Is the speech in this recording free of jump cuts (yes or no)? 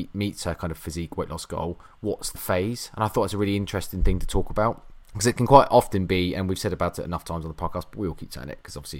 no